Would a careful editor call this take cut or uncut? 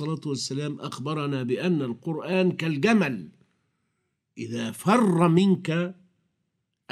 uncut